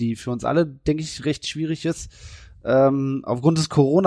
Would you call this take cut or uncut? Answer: uncut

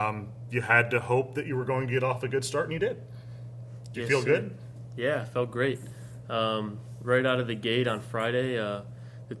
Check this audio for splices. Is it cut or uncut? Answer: uncut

